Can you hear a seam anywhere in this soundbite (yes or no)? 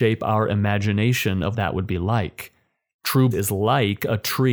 yes